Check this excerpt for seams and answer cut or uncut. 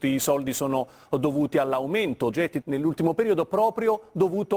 cut